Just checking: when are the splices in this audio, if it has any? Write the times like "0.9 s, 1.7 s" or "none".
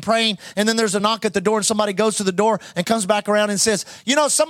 none